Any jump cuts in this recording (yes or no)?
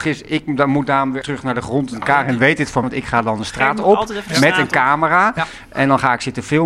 yes